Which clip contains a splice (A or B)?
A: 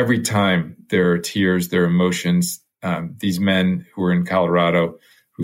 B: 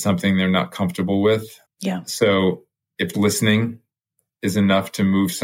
B